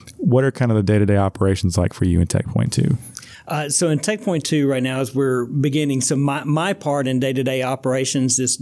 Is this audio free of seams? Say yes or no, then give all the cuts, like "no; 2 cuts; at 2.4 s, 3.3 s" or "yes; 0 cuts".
yes; 0 cuts